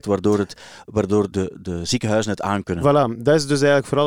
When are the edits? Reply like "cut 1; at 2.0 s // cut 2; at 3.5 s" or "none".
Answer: cut 1; at 1.3 s